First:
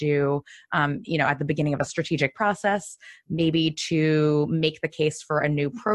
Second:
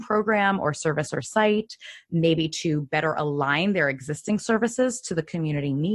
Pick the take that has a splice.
first; 2 cuts; at 1.0 s, 2.3 s

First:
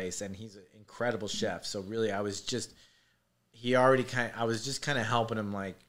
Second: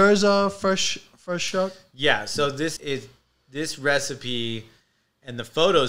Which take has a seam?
second; 1 cut; at 2.8 s

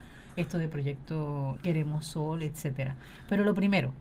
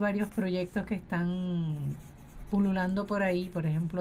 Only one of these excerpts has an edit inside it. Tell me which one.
first; 1 cut; at 1.6 s

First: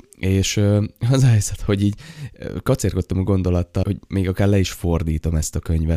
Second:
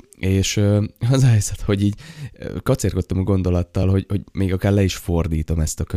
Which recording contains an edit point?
first; 1 cut; at 3.8 s

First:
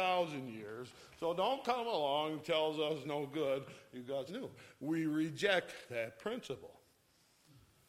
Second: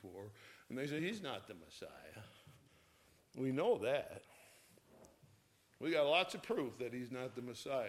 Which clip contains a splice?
first; 2 cuts; at 3.0 s, 4.3 s

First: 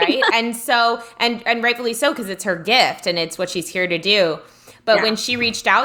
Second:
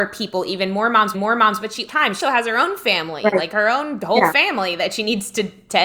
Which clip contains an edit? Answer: second; 3 cuts; at 1.1 s, 1.9 s, 2.2 s

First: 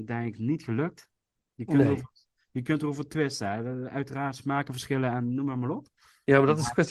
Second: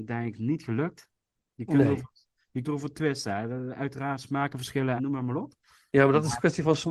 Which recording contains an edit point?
second; 2 cuts; at 2.6 s, 5.0 s

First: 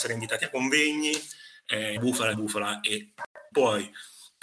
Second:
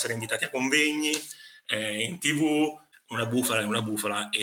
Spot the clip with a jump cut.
first; 3 cuts; at 2.0 s, 2.3 s, 3.5 s

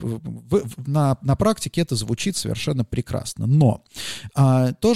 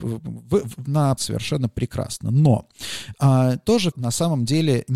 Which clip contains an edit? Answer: second; 2 cuts; at 1.2 s, 3.9 s

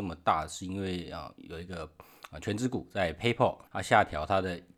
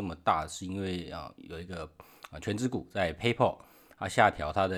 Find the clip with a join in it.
first; 1 cut; at 3.7 s

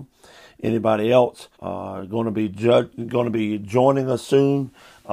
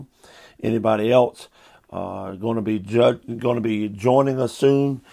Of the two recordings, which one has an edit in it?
first; 1 cut; at 1.5 s

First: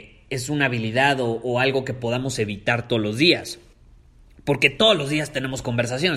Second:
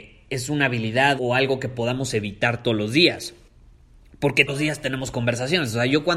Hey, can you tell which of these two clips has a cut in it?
second; 2 cuts; at 1.2 s, 4.5 s

